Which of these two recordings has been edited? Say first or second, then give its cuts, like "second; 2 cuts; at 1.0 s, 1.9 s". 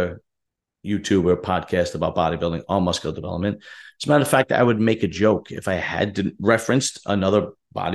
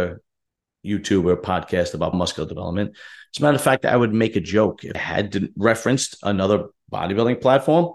second; 2 cuts; at 2.1 s, 4.9 s